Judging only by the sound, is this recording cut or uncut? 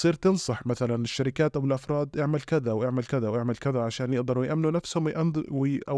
uncut